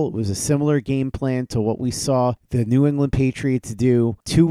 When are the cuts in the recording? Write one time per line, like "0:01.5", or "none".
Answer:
none